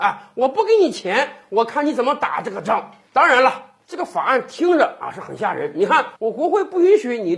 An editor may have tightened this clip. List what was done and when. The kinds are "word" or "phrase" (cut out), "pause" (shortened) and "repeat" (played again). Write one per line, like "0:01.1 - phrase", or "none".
0:06.2 - pause